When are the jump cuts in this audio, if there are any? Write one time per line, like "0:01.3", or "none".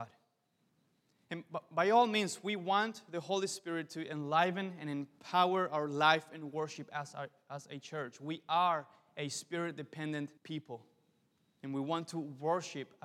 0:01.0
0:10.4